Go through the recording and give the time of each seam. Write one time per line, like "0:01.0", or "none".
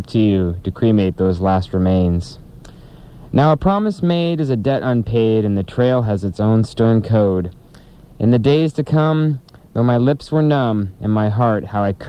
none